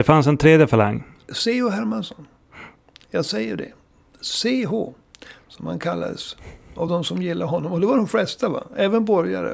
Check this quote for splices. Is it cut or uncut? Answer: uncut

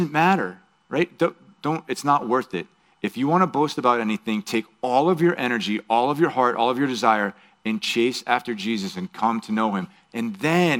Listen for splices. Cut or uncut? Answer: uncut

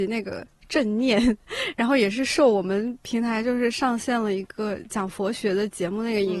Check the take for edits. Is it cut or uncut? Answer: uncut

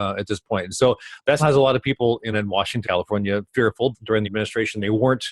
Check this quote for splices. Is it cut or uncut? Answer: cut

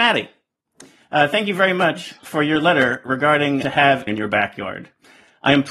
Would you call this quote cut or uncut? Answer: cut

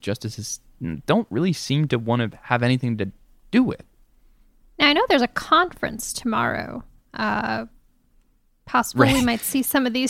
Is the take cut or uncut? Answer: uncut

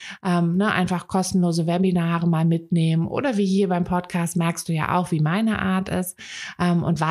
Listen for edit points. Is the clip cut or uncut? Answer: uncut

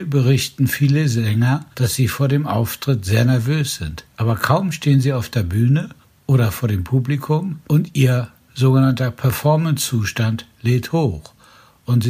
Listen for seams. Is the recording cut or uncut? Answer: cut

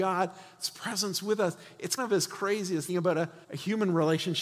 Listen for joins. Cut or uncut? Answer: cut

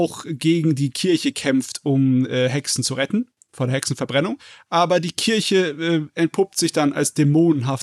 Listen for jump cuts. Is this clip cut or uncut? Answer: uncut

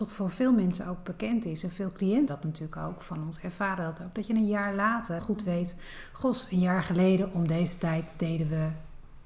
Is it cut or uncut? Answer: cut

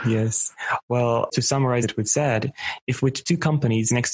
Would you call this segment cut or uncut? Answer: cut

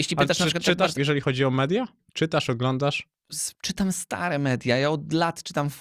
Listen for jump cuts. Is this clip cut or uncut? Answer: cut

